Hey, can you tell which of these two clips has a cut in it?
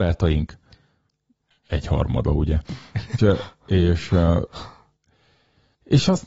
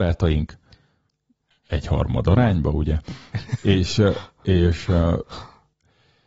first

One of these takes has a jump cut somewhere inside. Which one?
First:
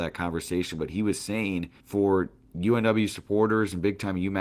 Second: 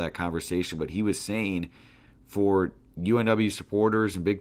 first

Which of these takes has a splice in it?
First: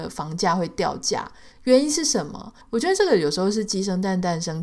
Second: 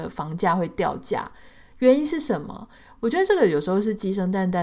first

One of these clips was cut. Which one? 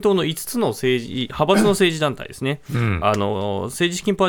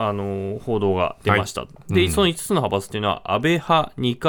first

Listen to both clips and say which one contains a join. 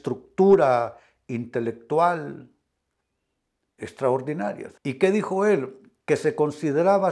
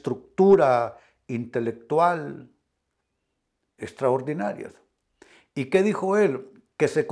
first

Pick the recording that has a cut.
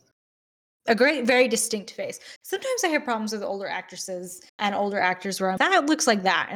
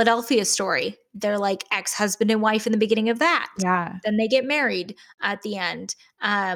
first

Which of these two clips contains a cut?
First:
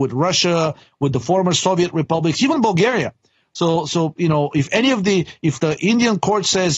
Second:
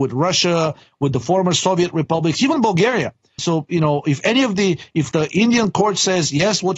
second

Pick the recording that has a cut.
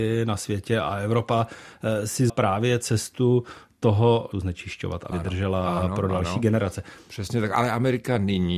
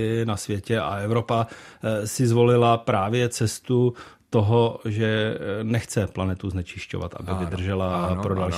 first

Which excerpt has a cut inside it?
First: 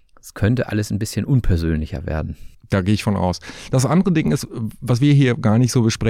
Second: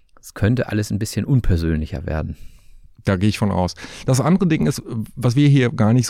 first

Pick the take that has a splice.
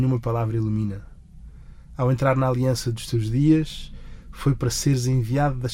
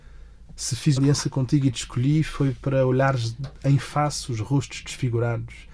second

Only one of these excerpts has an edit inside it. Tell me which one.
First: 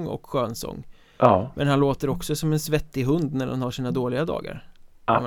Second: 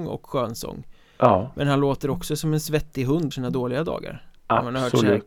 second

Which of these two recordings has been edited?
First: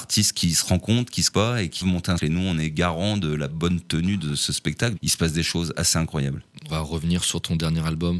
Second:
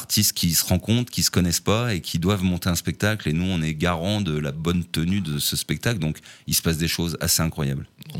first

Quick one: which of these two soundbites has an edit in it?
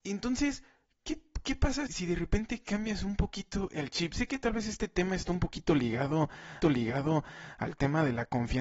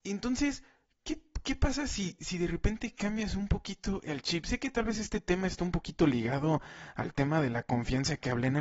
first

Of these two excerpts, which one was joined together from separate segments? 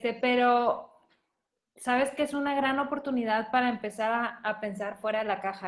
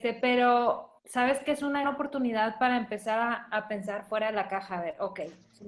second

